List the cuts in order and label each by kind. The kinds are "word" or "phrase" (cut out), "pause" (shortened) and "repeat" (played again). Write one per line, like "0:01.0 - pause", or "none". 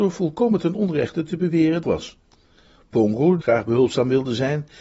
0:01.8 - phrase
0:03.4 - phrase